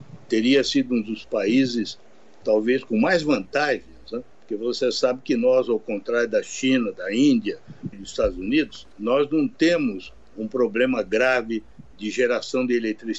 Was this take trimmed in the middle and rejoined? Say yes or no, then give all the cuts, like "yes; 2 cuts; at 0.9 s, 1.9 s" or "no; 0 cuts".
yes; 3 cuts; at 4.3 s, 7.9 s, 8.9 s